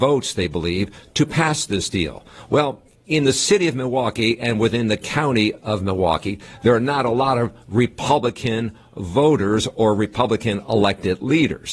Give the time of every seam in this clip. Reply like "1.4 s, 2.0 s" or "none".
none